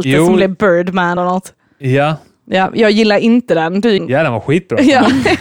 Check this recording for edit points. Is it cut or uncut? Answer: cut